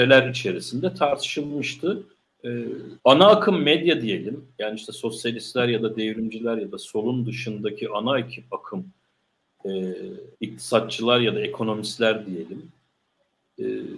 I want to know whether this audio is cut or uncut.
cut